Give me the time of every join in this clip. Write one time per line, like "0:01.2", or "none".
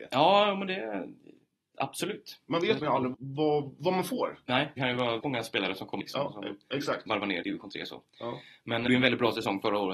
0:02.8
0:03.1
0:04.8
0:05.2
0:06.0
0:07.4
0:08.9